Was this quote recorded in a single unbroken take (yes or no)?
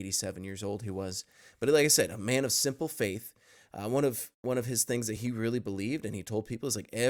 yes